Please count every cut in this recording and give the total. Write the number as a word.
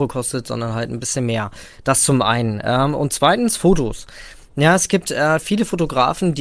zero